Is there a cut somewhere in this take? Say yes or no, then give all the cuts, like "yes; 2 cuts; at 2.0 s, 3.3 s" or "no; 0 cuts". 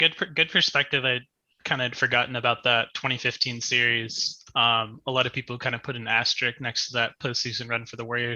no; 0 cuts